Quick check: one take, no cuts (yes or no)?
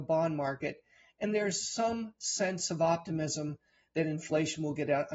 yes